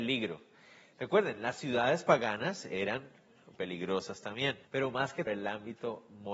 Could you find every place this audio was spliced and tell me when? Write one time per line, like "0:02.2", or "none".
0:03.5
0:04.6
0:05.3